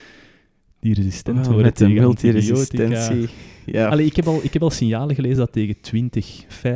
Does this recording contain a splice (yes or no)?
no